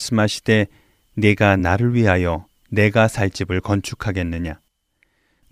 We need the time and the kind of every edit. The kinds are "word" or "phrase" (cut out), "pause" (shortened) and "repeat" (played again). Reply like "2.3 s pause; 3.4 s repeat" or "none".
none